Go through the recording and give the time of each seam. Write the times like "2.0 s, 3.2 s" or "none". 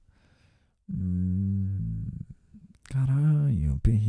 none

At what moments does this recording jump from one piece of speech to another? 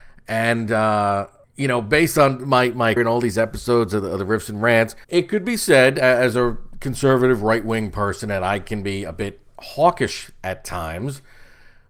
1.4 s, 3.0 s, 5.0 s

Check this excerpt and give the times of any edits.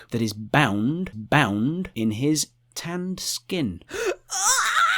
1.1 s

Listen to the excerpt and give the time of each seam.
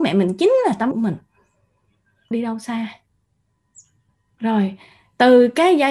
0.9 s, 2.3 s

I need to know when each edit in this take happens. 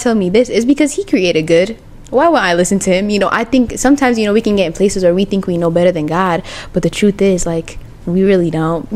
none

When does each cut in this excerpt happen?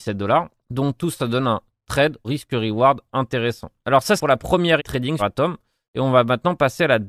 1.1 s, 2.2 s, 4.2 s, 4.8 s, 5.2 s

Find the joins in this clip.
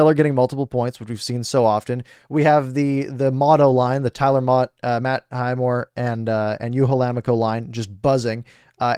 none

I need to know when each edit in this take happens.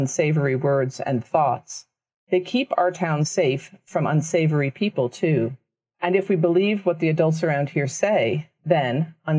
none

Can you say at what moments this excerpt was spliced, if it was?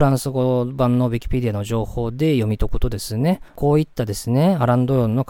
3.5 s

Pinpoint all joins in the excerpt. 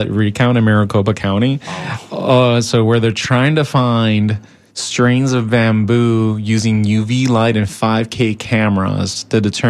none

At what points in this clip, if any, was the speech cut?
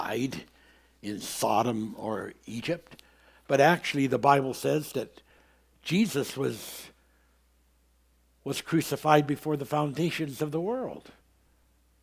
none

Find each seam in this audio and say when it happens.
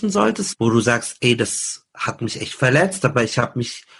1.9 s

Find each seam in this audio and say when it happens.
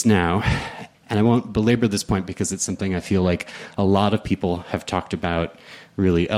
0.9 s

